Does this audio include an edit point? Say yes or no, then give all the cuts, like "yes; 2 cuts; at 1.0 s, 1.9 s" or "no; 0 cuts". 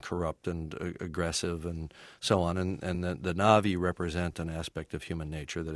no; 0 cuts